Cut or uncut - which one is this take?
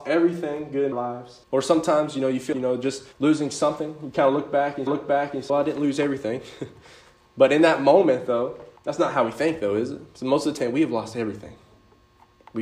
cut